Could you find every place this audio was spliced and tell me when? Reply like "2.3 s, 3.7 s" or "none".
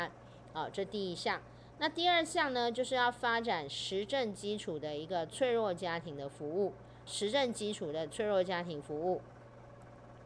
7.1 s